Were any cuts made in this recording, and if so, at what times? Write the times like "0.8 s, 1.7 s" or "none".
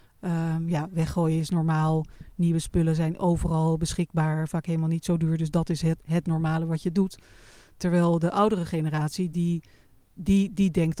none